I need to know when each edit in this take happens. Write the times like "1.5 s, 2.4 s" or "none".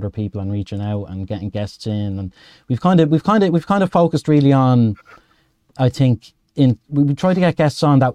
none